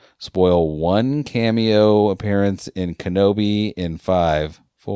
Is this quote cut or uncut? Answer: uncut